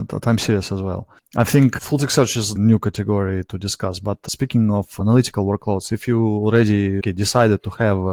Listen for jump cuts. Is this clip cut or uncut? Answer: cut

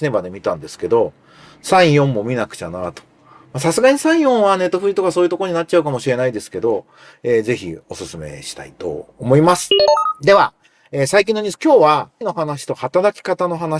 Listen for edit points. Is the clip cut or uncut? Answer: cut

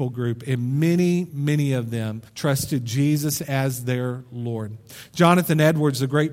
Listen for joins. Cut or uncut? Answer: cut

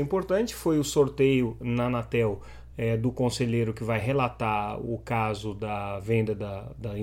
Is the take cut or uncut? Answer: uncut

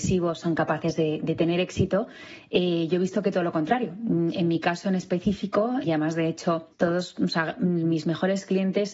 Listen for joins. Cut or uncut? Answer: cut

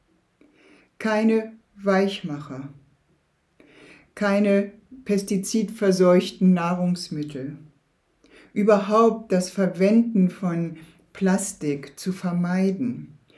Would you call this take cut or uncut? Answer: uncut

